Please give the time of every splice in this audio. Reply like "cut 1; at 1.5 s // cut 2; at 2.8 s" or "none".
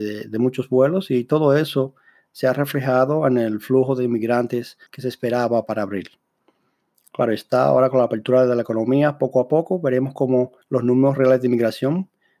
cut 1; at 4.9 s // cut 2; at 10.6 s